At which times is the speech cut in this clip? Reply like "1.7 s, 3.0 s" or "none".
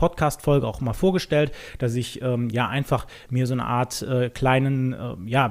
none